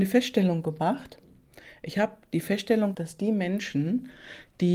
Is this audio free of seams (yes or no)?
no